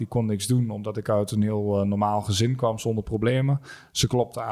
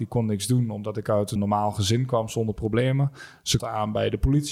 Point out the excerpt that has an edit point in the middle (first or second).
second